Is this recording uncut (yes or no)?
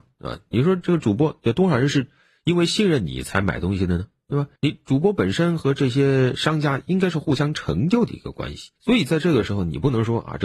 no